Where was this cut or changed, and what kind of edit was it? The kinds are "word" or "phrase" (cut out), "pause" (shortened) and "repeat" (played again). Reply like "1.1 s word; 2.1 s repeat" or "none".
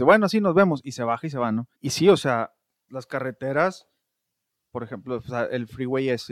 1.7 s pause; 2.9 s word

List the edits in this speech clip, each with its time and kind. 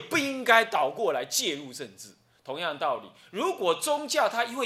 none

